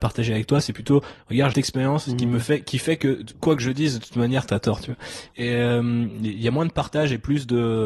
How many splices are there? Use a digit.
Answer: 1